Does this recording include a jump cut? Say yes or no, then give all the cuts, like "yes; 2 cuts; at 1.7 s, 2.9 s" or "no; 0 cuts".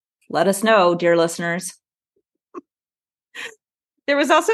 yes; 1 cut; at 2.7 s